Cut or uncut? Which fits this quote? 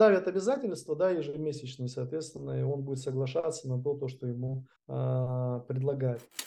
cut